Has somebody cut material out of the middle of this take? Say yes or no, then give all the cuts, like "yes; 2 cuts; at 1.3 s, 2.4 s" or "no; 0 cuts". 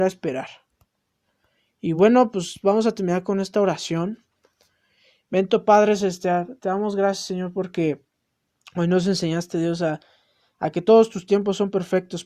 no; 0 cuts